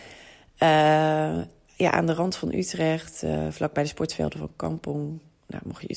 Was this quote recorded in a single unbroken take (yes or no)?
yes